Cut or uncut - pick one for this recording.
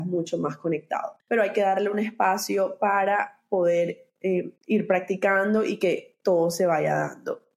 cut